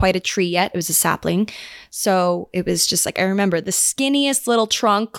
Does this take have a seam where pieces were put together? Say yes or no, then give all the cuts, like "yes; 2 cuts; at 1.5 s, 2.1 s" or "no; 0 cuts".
no; 0 cuts